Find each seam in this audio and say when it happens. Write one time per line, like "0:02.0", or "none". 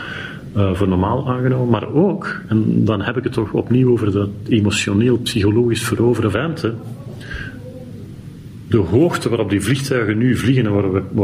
0:06.3